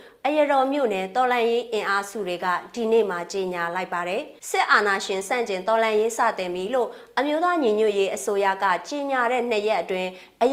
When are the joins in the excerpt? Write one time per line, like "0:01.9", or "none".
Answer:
0:04.4